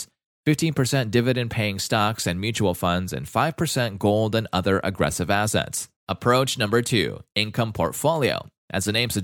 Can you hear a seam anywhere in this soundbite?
yes; 1 cut; at 6.0 s

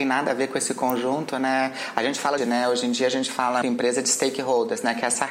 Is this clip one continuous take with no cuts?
no; 2 cuts; at 2.4 s, 3.6 s

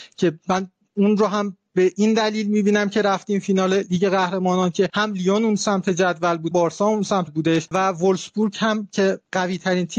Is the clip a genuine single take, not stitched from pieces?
no; 2 cuts; at 6.5 s, 7.3 s

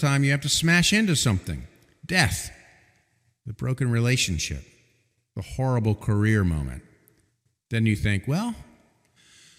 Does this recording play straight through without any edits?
yes; 0 cuts

